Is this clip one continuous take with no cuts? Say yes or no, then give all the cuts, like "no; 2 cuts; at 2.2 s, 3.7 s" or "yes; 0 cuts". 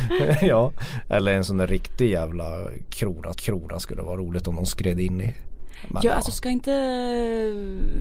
no; 1 cut; at 3.3 s